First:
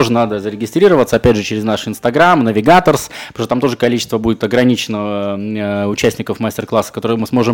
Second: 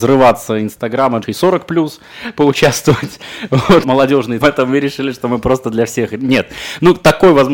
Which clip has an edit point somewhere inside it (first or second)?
second